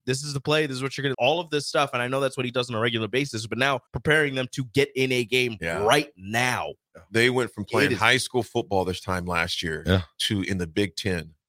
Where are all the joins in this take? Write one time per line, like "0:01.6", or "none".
0:01.1
0:03.9